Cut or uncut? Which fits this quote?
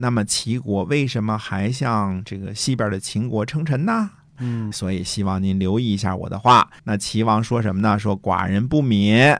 cut